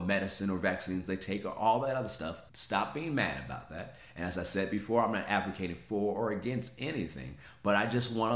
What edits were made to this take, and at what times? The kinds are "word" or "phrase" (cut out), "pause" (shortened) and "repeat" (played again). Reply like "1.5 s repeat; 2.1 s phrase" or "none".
2.5 s pause